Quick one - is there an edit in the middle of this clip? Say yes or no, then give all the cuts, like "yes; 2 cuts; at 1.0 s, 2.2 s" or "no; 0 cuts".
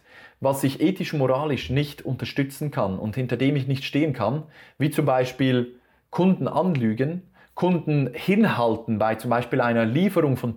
no; 0 cuts